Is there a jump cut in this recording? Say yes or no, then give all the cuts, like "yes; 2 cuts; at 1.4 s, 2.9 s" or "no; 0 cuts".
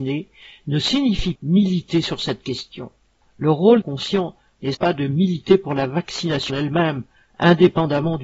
yes; 5 cuts; at 1.4 s, 3.2 s, 3.8 s, 4.7 s, 6.5 s